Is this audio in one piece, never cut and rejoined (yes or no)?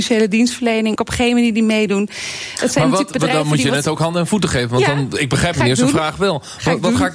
no